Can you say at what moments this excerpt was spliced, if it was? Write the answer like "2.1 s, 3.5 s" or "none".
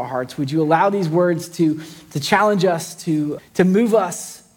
3.4 s